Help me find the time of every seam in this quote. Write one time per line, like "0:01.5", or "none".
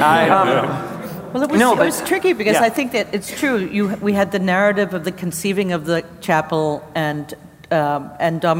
none